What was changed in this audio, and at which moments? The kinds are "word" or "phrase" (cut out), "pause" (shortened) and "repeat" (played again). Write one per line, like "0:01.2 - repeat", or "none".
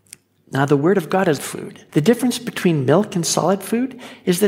0:01.4 - phrase
0:01.9 - pause